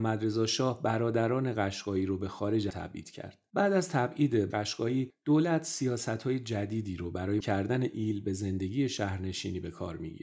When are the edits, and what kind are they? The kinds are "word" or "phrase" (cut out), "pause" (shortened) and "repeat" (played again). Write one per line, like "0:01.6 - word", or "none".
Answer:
0:02.7 - phrase
0:04.5 - word
0:07.4 - word